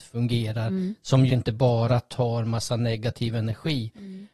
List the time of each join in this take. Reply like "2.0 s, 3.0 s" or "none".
1.3 s